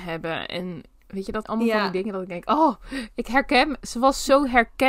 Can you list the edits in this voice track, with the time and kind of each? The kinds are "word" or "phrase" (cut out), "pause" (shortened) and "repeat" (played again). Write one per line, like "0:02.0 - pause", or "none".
0:01.4 - word
0:03.8 - word

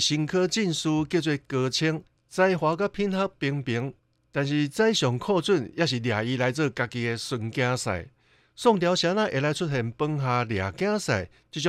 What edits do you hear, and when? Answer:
none

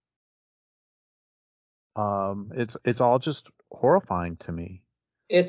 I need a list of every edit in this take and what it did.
none

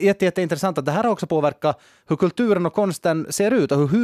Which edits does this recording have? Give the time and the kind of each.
none

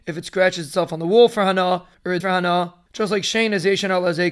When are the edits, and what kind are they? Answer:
0:02.2 - phrase

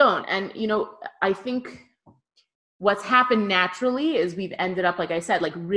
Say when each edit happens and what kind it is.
none

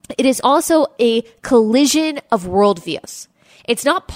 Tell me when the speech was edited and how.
none

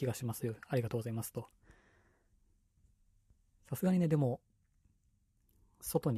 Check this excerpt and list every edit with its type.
none

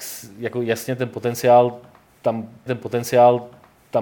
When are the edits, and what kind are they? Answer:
0:02.7 - repeat

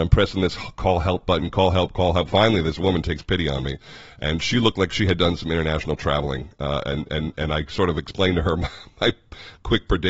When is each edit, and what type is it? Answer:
none

